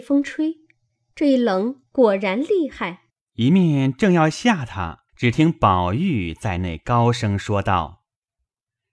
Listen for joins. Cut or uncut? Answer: cut